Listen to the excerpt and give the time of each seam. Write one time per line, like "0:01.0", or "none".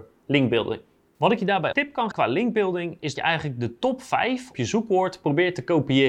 0:01.7
0:02.1
0:03.2
0:04.5